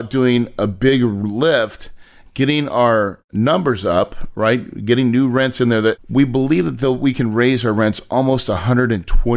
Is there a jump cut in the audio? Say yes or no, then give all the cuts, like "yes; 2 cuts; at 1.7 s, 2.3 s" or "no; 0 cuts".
no; 0 cuts